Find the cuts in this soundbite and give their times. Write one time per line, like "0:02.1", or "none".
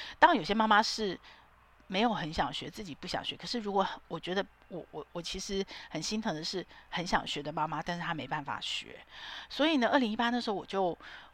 none